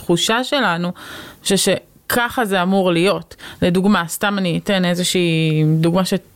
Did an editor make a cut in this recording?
no; 0 cuts

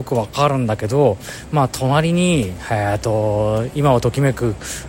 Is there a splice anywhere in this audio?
no; 0 cuts

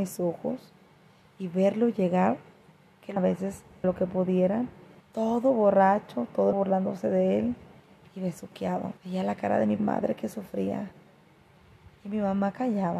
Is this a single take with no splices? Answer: no; 6 cuts; at 3.2 s, 3.8 s, 5.0 s, 6.5 s, 9.0 s, 9.8 s

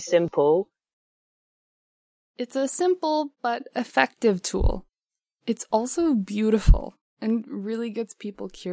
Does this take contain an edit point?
no; 0 cuts

